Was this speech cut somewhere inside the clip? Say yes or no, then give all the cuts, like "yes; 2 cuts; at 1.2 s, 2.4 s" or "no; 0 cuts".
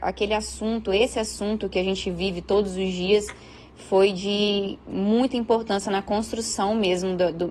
no; 0 cuts